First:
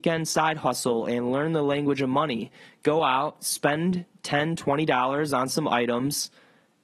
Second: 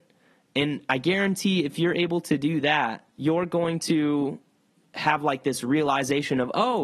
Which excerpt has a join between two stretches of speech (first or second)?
second